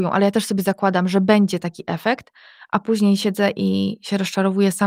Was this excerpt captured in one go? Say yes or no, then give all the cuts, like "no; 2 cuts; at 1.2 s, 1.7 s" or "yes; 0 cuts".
yes; 0 cuts